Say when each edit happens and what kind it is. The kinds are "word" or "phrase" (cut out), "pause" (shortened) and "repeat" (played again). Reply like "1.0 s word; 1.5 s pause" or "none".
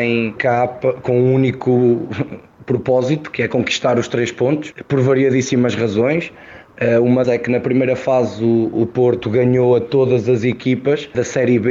7.2 s word

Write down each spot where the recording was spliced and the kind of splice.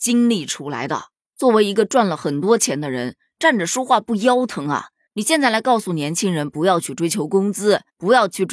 none

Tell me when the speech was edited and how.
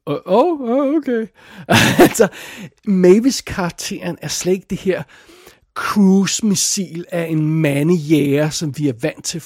none

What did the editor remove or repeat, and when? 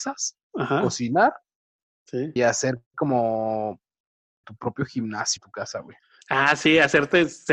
2.4 s word; 4.4 s word; 5.4 s word

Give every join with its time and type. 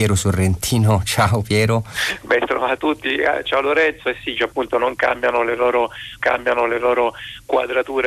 2.8 s word; 4.4 s phrase; 6.2 s repeat

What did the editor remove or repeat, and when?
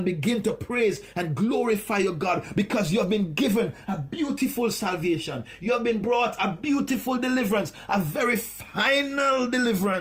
none

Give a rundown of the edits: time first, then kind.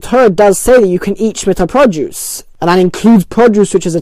none

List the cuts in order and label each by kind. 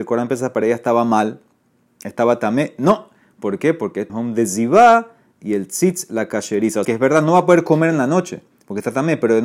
4.1 s phrase; 6.8 s word

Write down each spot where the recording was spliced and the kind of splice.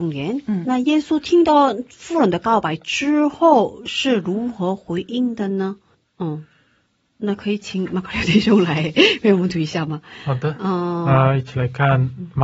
5.9 s pause

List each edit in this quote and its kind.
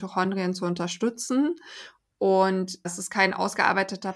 2.8 s word

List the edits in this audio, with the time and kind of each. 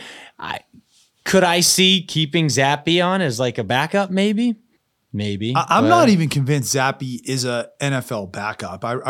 4.8 s pause

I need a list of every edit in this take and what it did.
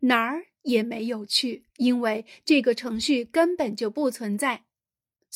1.7 s pause

